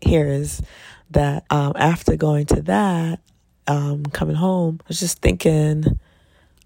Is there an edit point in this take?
yes; 3 cuts; at 1.5 s, 3.4 s, 4.8 s

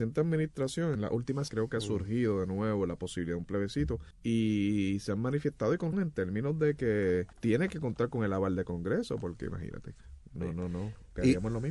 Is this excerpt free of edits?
no; 5 cuts; at 0.9 s, 1.5 s, 4.1 s, 5.9 s, 7.3 s

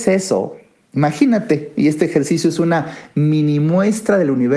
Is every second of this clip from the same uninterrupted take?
yes; 0 cuts

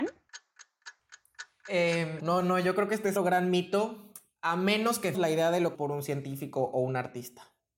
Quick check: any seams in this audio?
yes; 4 cuts; at 2.2 s, 3.1 s, 5.1 s, 5.7 s

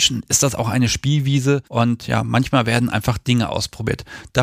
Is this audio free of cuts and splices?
no; 1 cut; at 1.7 s

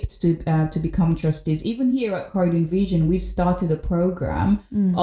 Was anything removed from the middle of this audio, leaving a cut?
no; 0 cuts

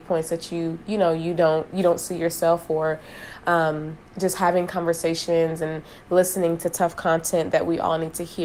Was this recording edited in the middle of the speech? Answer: yes; 1 cut; at 4.1 s

